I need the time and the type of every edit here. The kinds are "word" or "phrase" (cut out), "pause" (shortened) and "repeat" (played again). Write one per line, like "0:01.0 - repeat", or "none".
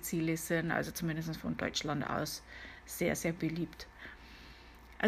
none